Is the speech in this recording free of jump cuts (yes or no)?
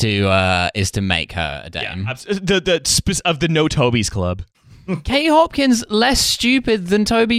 yes